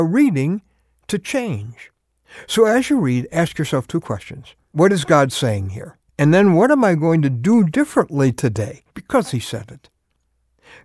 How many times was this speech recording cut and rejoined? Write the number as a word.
three